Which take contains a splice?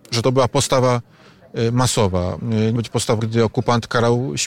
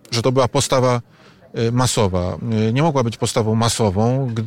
first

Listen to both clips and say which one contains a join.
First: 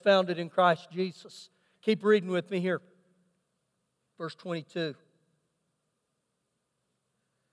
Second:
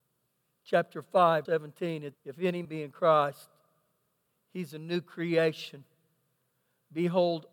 second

